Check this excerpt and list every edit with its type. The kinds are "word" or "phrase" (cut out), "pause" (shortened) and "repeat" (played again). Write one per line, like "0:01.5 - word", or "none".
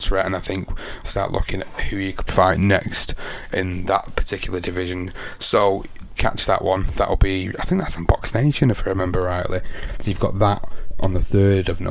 0:01.0 - phrase
0:01.6 - word
0:02.3 - word
0:06.2 - word
0:08.0 - word

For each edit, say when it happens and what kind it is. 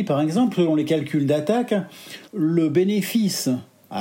0:02.3 - pause

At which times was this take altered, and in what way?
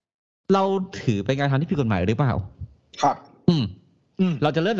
none

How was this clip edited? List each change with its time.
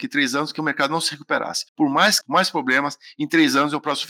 0:01.7 - pause
0:02.2 - word

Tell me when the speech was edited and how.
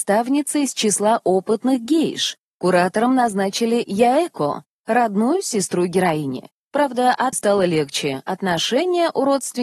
0:07.3 - phrase

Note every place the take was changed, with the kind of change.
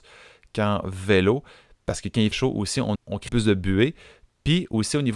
0:02.3 - word
0:03.0 - word
0:03.3 - word

